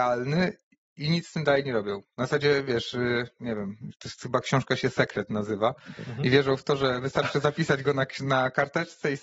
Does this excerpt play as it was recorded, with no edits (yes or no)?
yes